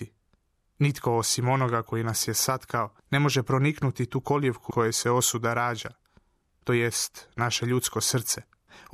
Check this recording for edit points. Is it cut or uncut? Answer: cut